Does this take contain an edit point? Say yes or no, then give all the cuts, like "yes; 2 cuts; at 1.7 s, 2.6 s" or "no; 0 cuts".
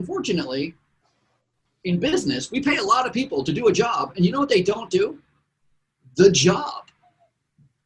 no; 0 cuts